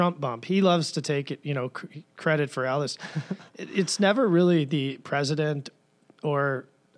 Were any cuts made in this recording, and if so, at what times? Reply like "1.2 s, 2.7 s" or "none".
none